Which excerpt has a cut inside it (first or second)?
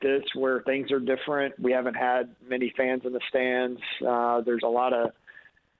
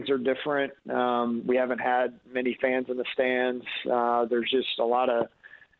first